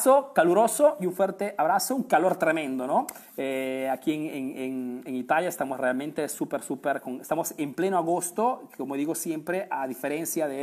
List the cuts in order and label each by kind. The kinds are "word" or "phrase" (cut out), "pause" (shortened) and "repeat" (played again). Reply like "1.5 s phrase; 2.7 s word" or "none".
3.3 s pause